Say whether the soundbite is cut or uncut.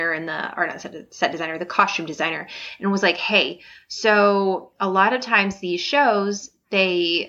uncut